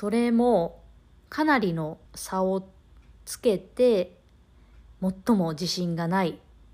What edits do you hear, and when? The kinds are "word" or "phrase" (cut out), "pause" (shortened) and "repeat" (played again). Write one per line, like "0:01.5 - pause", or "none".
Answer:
0:02.1 - pause
0:03.2 - pause